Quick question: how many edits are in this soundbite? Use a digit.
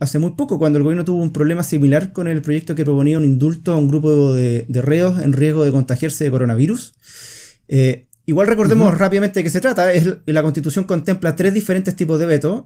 0